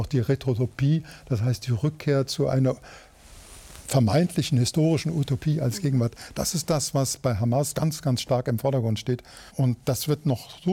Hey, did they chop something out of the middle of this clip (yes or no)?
yes